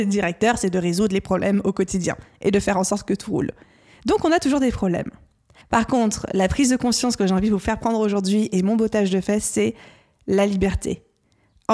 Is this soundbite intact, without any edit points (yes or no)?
yes